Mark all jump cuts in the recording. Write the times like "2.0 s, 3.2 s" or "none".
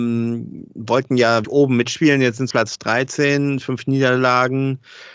1.4 s, 2.5 s